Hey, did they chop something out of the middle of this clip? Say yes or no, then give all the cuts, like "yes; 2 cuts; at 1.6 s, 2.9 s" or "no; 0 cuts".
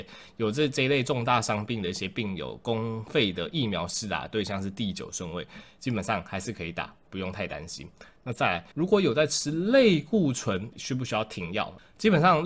yes; 2 cuts; at 8.7 s, 10.7 s